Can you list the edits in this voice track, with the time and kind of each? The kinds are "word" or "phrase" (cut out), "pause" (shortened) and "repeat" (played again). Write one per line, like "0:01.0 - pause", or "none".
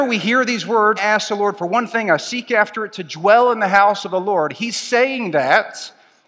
0:01.0 - word